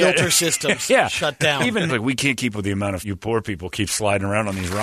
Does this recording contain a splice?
yes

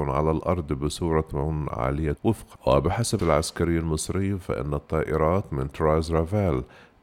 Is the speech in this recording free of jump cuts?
no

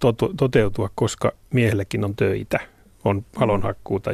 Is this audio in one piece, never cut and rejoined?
yes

